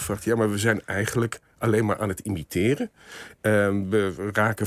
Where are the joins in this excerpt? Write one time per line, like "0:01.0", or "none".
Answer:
none